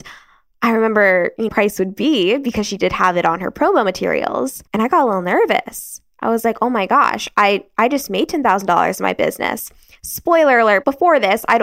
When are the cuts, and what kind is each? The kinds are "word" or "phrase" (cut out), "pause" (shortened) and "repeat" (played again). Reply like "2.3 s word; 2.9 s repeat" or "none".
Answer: 1.5 s phrase; 4.7 s pause